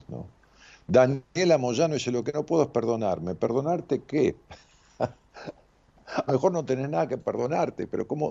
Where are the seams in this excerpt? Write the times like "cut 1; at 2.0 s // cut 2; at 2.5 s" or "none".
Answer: cut 1; at 6.3 s

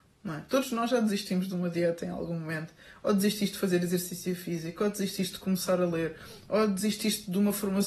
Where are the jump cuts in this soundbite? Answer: none

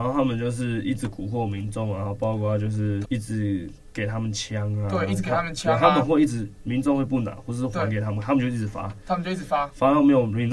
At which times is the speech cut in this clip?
cut 1; at 3.0 s

